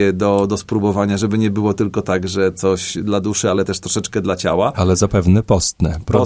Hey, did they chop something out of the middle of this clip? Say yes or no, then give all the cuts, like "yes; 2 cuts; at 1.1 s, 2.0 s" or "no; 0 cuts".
no; 0 cuts